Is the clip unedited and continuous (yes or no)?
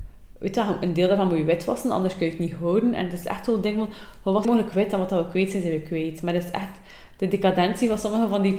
no